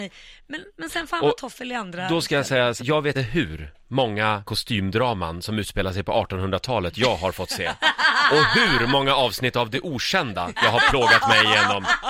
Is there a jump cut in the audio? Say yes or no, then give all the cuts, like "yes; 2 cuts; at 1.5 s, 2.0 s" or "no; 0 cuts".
yes; 3 cuts; at 2.8 s, 3.1 s, 4.4 s